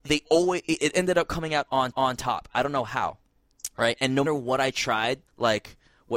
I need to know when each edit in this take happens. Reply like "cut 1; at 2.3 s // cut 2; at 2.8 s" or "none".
cut 1; at 0.9 s // cut 2; at 1.9 s // cut 3; at 4.3 s // cut 4; at 5.3 s